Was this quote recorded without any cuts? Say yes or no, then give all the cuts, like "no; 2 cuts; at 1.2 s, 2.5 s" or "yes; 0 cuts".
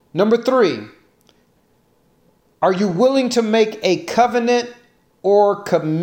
yes; 0 cuts